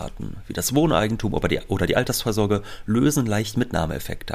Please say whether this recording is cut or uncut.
uncut